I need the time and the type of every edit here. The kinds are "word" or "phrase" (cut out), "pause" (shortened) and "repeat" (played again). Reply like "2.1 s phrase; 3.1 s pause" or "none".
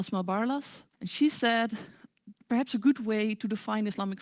0.9 s pause